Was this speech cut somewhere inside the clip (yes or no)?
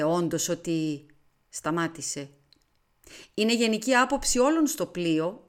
no